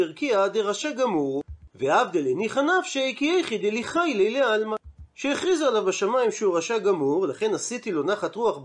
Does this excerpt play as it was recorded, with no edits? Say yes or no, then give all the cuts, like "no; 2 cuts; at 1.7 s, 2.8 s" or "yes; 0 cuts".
yes; 0 cuts